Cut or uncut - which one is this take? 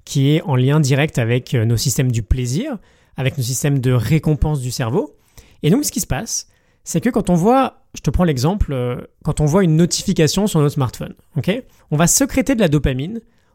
uncut